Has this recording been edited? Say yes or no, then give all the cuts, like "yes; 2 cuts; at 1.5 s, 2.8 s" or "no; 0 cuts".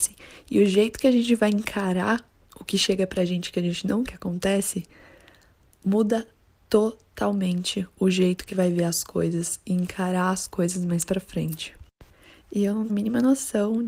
yes; 3 cuts; at 4.1 s, 8.5 s, 12.9 s